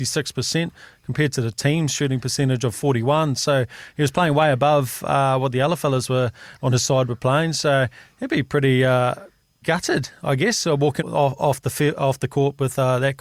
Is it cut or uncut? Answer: cut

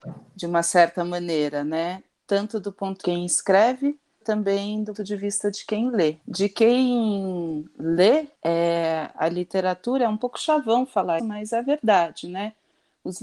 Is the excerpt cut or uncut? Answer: cut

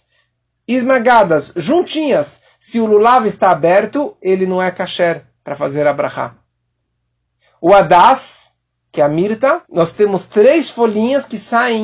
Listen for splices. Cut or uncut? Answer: cut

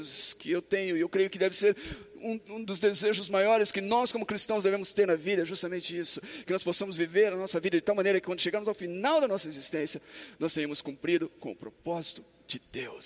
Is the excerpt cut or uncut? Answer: uncut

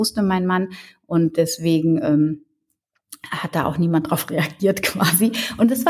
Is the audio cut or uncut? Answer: uncut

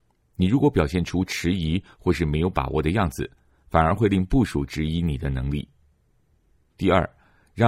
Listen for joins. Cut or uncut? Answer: uncut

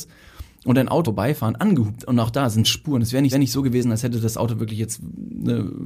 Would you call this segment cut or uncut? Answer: cut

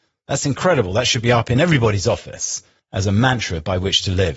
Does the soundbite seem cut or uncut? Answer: cut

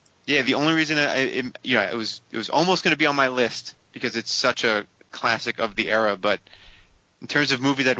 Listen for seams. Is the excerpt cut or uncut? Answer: uncut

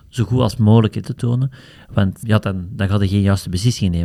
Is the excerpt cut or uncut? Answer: cut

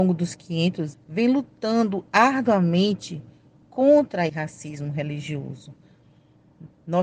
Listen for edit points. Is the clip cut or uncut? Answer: cut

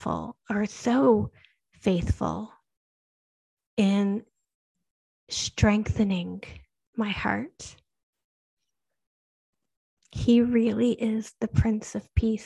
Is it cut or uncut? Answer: uncut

